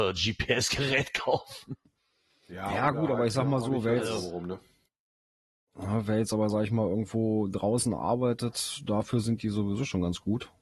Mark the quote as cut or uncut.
uncut